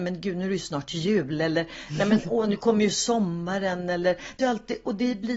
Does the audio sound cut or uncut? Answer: cut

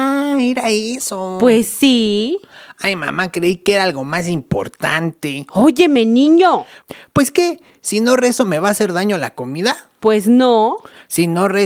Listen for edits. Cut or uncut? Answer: uncut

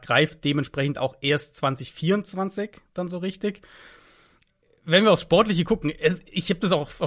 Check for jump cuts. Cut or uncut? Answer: uncut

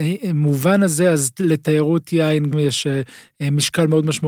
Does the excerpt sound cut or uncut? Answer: cut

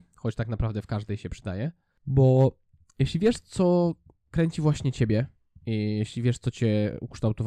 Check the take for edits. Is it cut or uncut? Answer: uncut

